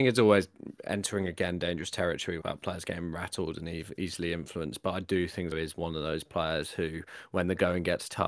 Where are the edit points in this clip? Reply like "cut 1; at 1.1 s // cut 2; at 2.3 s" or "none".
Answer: cut 1; at 2.4 s // cut 2; at 5.5 s